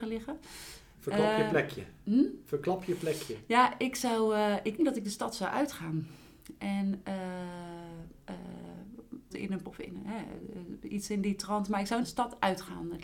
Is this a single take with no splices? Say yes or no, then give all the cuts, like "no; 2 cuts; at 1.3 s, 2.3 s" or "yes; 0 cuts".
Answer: no; 4 cuts; at 4.8 s, 9.3 s, 9.6 s, 12.0 s